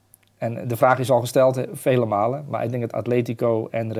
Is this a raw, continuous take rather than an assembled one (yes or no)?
yes